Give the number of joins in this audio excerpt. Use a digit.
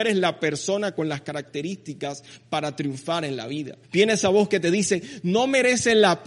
1